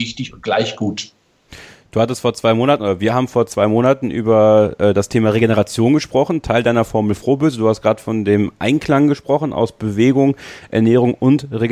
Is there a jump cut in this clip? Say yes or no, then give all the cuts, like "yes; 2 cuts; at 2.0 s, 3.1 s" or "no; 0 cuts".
no; 0 cuts